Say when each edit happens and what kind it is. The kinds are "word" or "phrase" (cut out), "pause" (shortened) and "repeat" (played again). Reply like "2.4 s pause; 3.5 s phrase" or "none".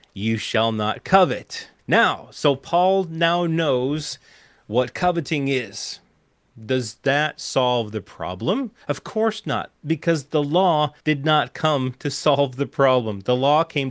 1.8 s pause; 8.8 s pause; 11.0 s pause